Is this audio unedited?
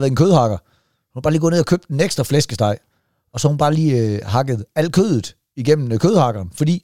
yes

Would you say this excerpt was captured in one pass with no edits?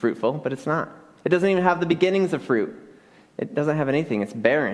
yes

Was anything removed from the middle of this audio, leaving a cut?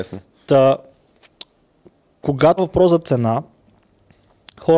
yes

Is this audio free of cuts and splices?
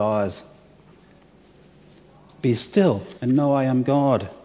no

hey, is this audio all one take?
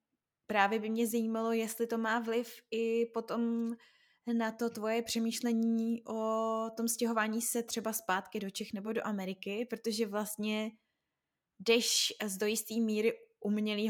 yes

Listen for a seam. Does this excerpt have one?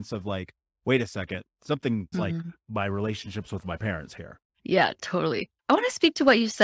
yes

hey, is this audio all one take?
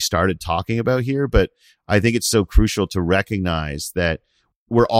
yes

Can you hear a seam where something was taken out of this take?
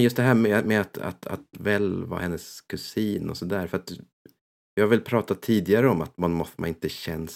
no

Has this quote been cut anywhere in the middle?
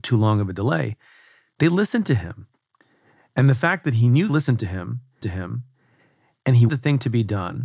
yes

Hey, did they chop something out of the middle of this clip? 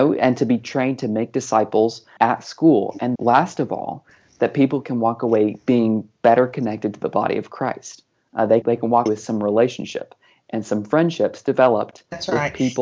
yes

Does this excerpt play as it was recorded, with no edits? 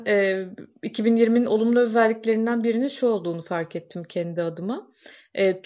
yes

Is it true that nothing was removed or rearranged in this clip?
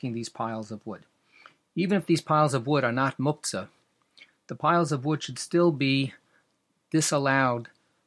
yes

